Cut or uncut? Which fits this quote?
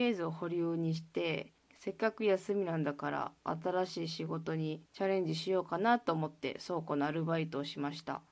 cut